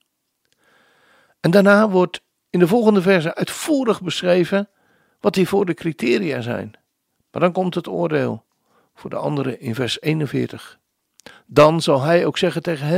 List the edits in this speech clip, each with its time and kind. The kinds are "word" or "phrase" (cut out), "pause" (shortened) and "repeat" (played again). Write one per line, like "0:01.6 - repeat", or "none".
none